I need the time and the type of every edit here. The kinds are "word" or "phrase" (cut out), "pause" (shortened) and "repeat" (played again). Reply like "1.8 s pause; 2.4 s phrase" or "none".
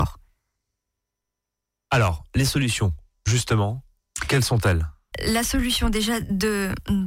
5.1 s word